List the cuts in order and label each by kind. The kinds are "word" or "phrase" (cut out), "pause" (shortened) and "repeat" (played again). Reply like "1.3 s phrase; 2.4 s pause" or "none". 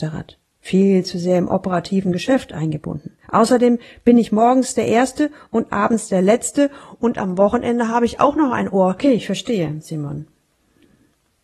3.2 s pause